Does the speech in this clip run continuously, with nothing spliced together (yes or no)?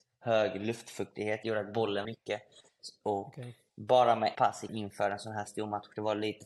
no